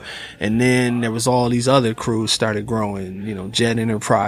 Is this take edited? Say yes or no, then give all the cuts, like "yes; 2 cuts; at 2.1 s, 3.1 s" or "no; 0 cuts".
no; 0 cuts